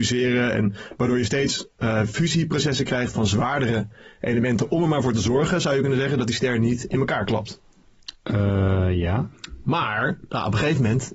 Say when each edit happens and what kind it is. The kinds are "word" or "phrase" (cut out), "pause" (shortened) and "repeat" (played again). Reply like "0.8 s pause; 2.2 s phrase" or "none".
none